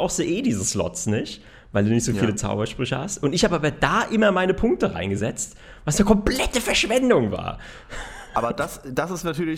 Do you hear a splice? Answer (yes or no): no